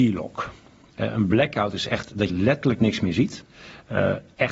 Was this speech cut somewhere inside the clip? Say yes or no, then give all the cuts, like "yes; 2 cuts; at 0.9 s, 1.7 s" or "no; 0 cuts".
yes; 1 cut; at 2.3 s